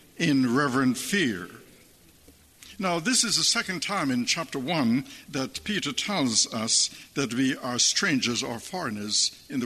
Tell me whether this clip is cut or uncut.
uncut